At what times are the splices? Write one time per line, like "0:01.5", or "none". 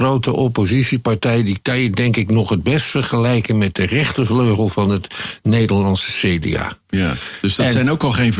0:06.8